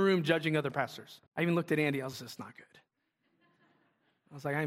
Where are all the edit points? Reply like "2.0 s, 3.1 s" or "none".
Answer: 1.3 s, 2.1 s